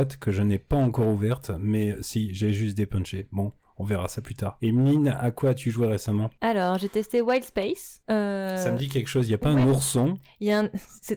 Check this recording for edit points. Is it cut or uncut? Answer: uncut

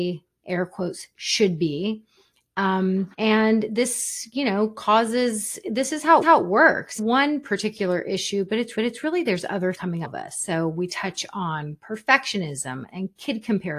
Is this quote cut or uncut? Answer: cut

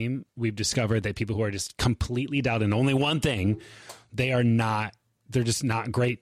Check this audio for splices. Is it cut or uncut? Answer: uncut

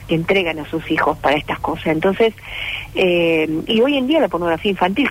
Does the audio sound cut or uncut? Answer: uncut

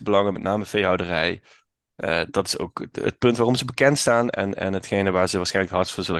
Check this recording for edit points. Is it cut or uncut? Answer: uncut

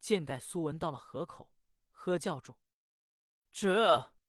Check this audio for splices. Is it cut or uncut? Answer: uncut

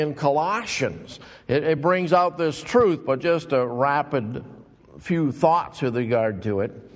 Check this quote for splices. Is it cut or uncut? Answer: uncut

